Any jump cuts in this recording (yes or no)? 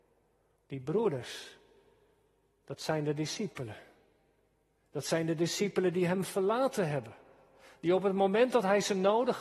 no